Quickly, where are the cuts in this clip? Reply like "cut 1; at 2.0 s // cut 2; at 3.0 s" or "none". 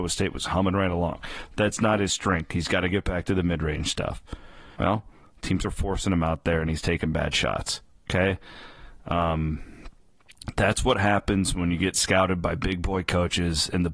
cut 1; at 4.7 s